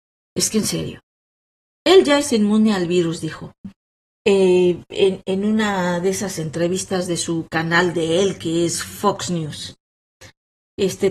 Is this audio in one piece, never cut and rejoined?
yes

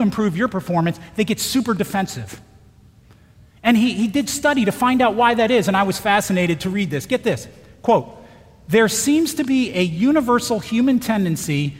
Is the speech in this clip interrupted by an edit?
no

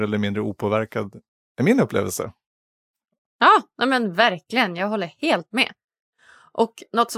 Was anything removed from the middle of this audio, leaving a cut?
no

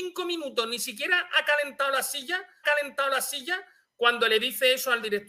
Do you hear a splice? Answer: yes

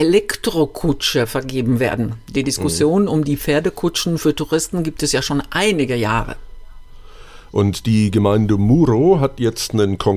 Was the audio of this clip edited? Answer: no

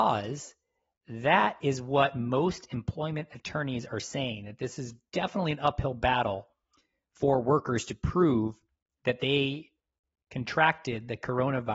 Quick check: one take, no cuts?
yes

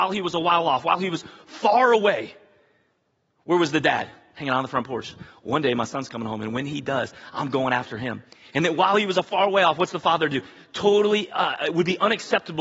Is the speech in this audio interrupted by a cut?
no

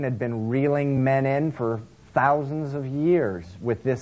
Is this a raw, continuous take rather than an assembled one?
yes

